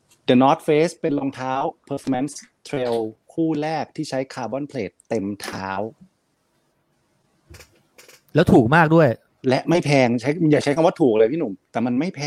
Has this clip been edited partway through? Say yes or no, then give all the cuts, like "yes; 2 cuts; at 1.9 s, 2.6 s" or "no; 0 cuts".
yes; 2 cuts; at 3.2 s, 9.3 s